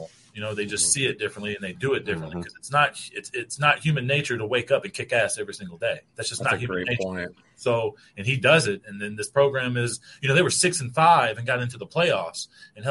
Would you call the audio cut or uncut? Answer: uncut